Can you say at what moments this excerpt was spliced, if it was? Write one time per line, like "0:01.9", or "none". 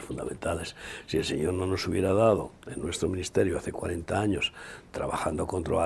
none